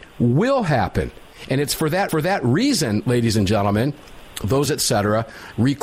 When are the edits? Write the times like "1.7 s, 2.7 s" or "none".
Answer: 2.1 s, 4.7 s